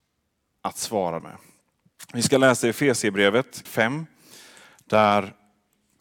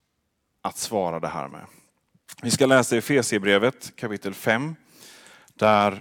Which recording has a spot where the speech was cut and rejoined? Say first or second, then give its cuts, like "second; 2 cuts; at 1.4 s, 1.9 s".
first; 2 cuts; at 1.2 s, 3.7 s